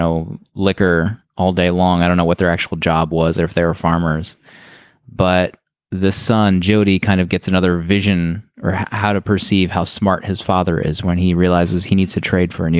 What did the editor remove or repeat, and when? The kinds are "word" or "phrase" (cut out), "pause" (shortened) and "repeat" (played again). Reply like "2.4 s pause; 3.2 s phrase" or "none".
none